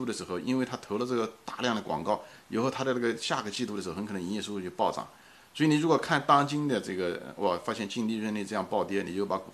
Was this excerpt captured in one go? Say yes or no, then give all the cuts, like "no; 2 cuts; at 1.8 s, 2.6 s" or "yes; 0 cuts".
yes; 0 cuts